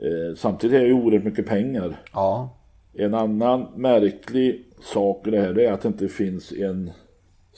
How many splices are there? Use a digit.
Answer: 2